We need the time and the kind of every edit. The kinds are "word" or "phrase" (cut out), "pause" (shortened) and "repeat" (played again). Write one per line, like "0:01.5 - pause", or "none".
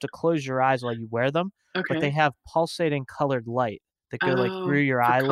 none